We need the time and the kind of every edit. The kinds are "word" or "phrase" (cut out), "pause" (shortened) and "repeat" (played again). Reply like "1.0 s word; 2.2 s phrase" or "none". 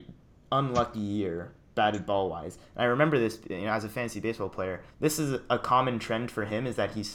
4.9 s pause